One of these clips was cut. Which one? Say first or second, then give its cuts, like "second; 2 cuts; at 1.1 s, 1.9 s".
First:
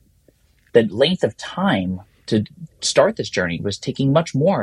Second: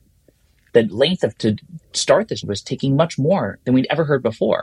second; 2 cuts; at 1.4 s, 2.4 s